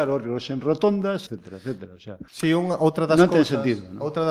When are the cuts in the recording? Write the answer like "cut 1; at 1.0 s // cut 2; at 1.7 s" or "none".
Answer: cut 1; at 1.3 s // cut 2; at 2.3 s